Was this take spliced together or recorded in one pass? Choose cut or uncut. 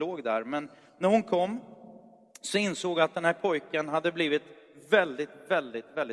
uncut